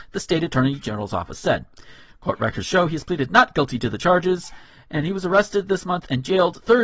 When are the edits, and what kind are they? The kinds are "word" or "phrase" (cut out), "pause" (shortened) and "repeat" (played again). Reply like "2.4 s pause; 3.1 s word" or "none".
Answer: none

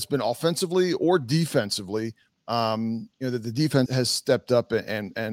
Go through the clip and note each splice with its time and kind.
3.1 s pause; 3.9 s word

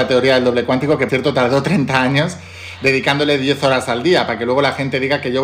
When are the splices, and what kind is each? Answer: 1.1 s word

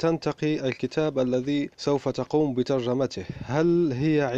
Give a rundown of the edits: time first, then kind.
1.7 s pause

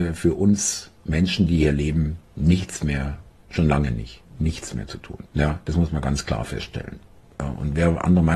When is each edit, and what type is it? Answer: 5.3 s pause

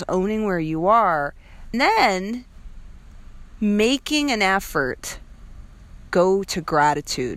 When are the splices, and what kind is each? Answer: 1.7 s word; 6.1 s word

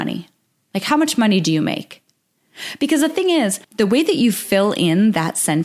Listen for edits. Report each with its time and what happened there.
3.6 s pause

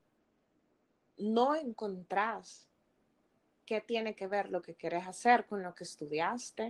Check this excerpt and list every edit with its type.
none

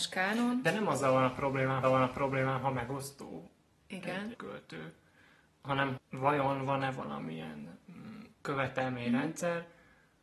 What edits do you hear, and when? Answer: 1.8 s repeat; 4.3 s word; 6.0 s word; 8.3 s pause

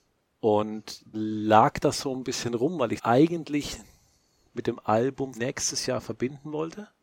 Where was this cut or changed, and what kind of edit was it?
1.1 s word; 3.0 s word; 5.3 s word

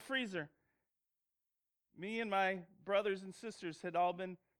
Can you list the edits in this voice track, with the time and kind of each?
none

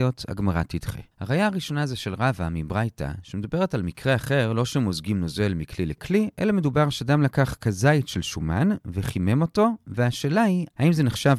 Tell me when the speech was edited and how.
1.1 s pause

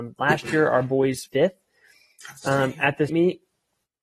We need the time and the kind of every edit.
1.3 s word; 3.1 s word

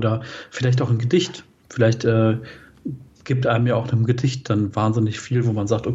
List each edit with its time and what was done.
none

